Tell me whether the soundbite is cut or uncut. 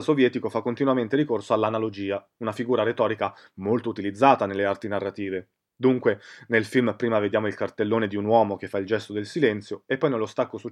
uncut